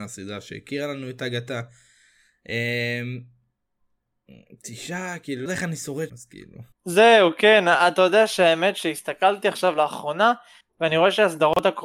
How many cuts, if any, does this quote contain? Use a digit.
3